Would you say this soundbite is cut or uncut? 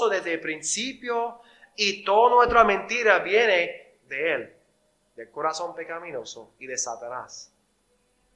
uncut